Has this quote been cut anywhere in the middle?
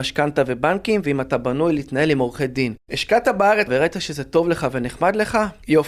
yes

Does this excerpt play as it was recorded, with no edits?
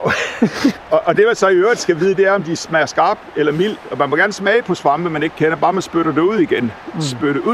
yes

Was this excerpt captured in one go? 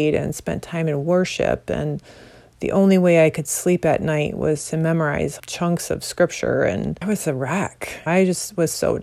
no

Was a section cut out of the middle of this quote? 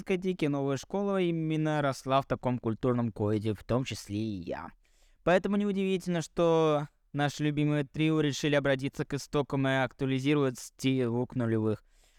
no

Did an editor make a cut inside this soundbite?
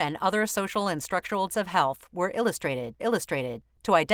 yes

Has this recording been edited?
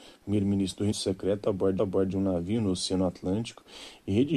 yes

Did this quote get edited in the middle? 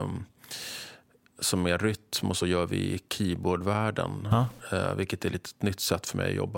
no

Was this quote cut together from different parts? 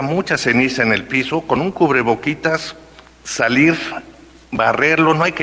no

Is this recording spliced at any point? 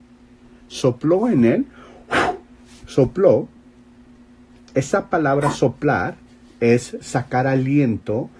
no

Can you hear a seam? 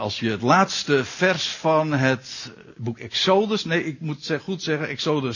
no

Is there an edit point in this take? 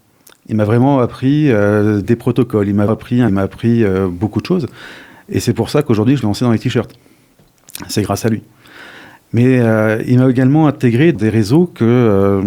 yes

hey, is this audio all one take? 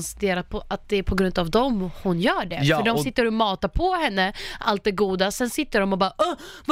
yes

